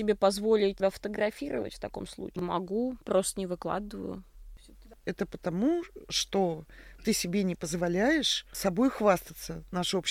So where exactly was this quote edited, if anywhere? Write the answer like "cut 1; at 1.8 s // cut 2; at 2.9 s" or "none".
none